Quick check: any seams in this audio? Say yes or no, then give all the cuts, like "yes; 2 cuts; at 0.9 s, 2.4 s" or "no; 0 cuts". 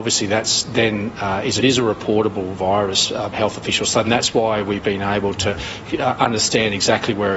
yes; 3 cuts; at 1.6 s, 3.3 s, 4.0 s